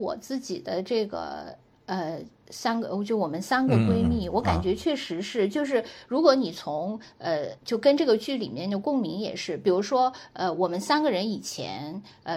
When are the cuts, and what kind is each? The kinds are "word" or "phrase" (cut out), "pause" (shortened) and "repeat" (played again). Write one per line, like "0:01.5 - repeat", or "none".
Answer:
0:07.6 - pause